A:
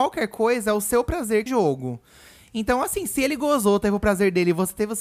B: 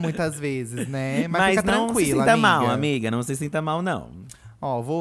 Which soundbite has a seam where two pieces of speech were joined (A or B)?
A